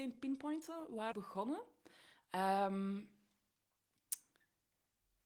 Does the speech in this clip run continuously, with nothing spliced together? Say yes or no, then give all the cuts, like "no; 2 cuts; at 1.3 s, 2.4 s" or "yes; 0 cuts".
no; 1 cut; at 1.1 s